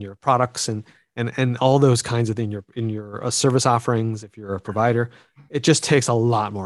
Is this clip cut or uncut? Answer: uncut